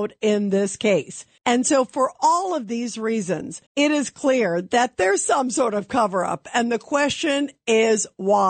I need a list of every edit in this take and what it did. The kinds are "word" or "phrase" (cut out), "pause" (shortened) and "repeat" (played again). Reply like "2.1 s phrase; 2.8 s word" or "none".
1.4 s pause; 3.7 s pause